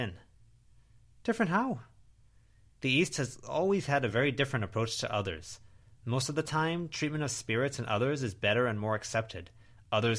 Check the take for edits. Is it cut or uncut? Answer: uncut